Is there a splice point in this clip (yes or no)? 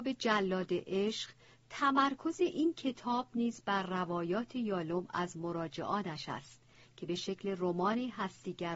no